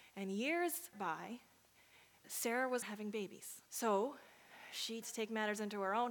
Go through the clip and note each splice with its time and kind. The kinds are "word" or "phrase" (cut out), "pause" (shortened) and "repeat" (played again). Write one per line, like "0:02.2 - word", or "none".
0:00.9 - word
0:02.2 - word
0:02.8 - word
0:03.7 - pause
0:05.0 - word